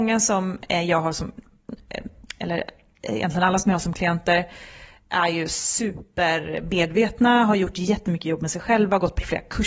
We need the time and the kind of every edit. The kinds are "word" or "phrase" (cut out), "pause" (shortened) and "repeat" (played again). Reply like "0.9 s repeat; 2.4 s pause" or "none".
none